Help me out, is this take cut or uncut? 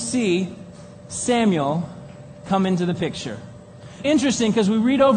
cut